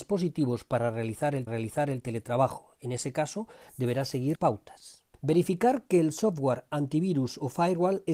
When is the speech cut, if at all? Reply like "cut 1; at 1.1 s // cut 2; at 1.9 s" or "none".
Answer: cut 1; at 1.5 s // cut 2; at 4.3 s // cut 3; at 5.1 s